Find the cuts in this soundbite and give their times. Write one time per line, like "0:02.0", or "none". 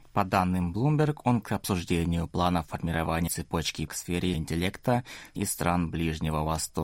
0:01.4
0:03.3
0:03.9
0:04.3
0:05.4